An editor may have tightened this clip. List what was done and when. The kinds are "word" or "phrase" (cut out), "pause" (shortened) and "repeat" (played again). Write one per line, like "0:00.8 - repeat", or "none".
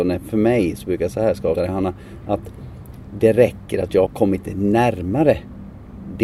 0:01.1 - word
0:01.5 - word
0:04.1 - word